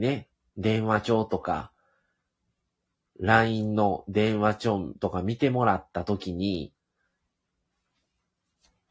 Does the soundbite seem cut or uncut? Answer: uncut